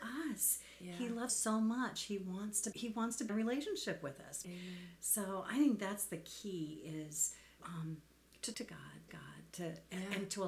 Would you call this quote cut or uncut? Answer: cut